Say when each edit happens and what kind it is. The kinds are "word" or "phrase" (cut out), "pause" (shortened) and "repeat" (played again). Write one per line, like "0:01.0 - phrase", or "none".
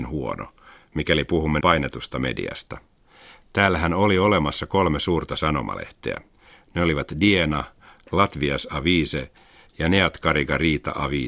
0:01.6 - word

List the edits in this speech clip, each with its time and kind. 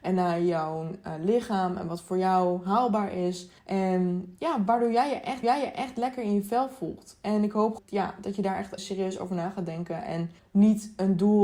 0:03.6 - pause
0:05.4 - repeat
0:07.8 - phrase
0:08.8 - word
0:10.4 - pause

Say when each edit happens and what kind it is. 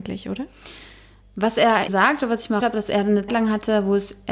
0:01.9 - word
0:02.6 - word
0:03.3 - word

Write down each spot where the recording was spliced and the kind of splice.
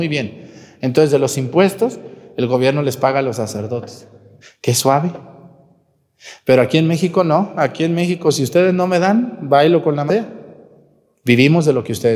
0:04.4 - pause
0:10.1 - word

